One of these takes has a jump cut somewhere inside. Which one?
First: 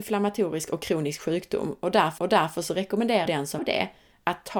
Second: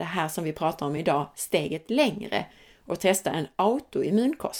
first; 3 cuts; at 2.2 s, 3.3 s, 3.6 s

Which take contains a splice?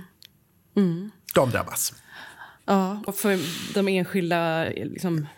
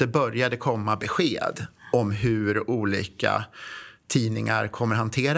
first; 1 cut; at 3.1 s

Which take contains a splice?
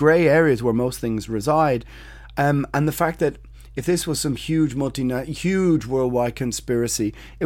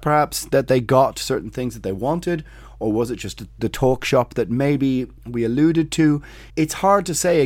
second; 2 cuts; at 5.2 s, 6.5 s

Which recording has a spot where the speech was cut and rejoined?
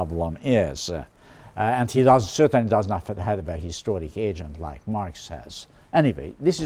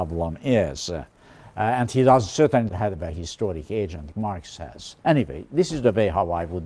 second; 3 cuts; at 2.7 s, 4.1 s, 5.0 s

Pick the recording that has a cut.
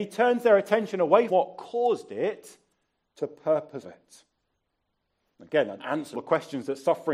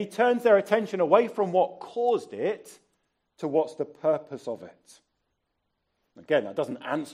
first; 5 cuts; at 1.3 s, 3.2 s, 3.8 s, 5.8 s, 6.1 s

